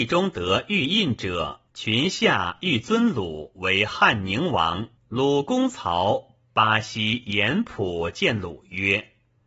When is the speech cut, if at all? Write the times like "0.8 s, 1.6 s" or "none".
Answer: 1.7 s, 5.0 s